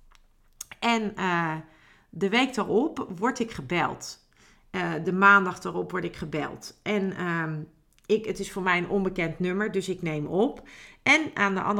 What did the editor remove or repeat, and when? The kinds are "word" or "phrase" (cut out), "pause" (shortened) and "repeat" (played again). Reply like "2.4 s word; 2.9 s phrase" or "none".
none